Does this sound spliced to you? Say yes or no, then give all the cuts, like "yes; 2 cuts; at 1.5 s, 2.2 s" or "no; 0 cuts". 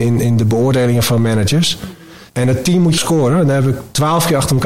yes; 2 cuts; at 2.3 s, 3.0 s